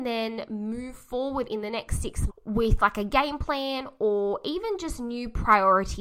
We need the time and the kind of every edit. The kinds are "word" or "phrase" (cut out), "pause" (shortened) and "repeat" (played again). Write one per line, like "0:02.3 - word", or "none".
0:02.3 - word